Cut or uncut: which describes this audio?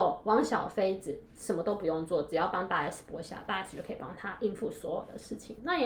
uncut